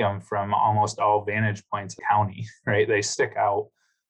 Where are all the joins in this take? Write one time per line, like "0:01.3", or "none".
0:02.0